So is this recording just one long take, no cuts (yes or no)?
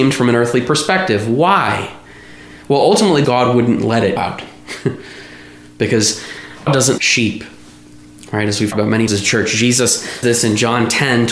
no